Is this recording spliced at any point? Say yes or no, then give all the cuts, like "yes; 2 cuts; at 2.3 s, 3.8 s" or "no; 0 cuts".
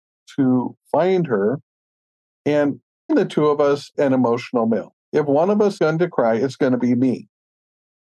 yes; 4 cuts; at 3.1 s, 3.9 s, 5.0 s, 5.8 s